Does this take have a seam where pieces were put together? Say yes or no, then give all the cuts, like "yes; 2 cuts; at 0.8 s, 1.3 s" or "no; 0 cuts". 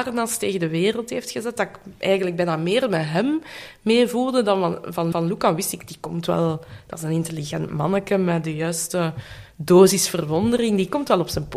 yes; 1 cut; at 5.1 s